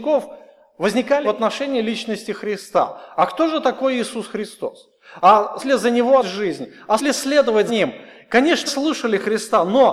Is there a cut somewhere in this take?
yes; 6 cuts; at 1.2 s, 5.6 s, 6.2 s, 7.0 s, 7.7 s, 8.7 s

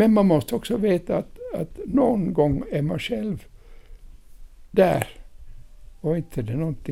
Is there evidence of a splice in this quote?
no; 0 cuts

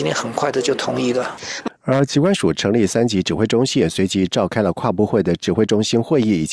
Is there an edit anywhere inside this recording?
yes; 1 cut; at 1.8 s

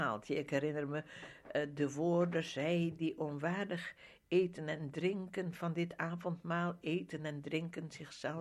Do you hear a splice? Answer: no; 0 cuts

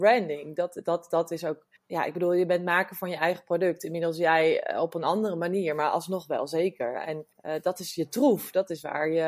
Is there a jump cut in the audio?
yes; 2 cuts; at 1.8 s, 7.3 s

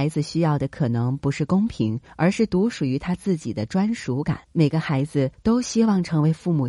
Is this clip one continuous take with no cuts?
no; 1 cut; at 4.4 s

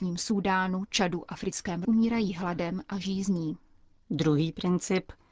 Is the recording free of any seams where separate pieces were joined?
no; 1 cut; at 1.8 s

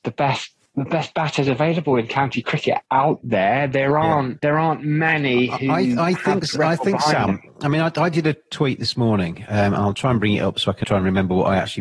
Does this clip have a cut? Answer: yes; 2 cuts; at 2.8 s, 10.8 s

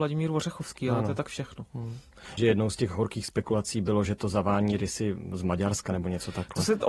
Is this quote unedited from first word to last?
no; 1 cut; at 2.4 s

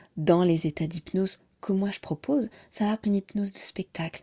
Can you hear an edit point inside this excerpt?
yes; 1 cut; at 3.0 s

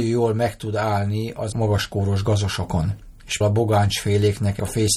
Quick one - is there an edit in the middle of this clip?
yes; 2 cuts; at 1.5 s, 3.4 s

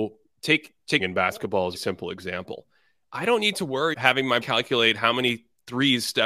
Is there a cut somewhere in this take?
yes; 4 cuts; at 1.0 s, 1.7 s, 3.9 s, 4.4 s

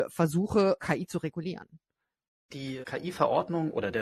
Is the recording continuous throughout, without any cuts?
yes; 0 cuts

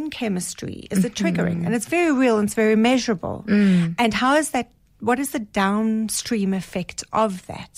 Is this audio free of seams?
yes; 0 cuts

